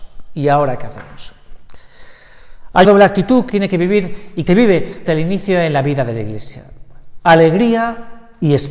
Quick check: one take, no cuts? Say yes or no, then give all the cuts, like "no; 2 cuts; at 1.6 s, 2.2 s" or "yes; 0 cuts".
no; 4 cuts; at 2.8 s, 3.5 s, 4.5 s, 5.1 s